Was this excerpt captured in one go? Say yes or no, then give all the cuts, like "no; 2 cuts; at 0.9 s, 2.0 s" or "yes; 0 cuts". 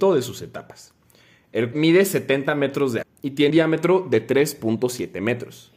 no; 3 cuts; at 1.7 s, 3.0 s, 3.5 s